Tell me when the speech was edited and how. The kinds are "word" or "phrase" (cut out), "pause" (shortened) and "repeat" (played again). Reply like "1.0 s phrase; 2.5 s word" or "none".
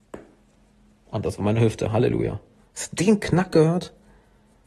none